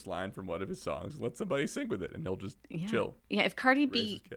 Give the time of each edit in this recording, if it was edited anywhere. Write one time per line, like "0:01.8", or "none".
0:02.6
0:03.2